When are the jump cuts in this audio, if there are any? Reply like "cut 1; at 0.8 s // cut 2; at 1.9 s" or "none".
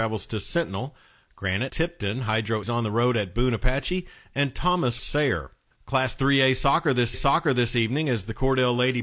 cut 1; at 1.7 s // cut 2; at 2.6 s // cut 3; at 5.0 s // cut 4; at 7.1 s